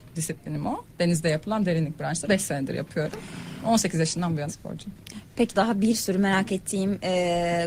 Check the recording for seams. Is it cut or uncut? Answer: cut